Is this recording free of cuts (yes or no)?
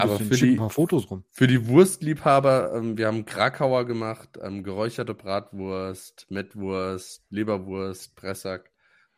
yes